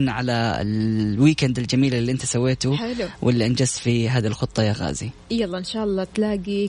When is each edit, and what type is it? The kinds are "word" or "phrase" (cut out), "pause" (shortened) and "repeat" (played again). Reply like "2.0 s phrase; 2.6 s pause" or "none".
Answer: none